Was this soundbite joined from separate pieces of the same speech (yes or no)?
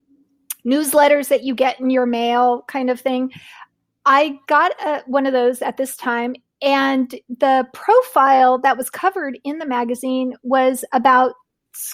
no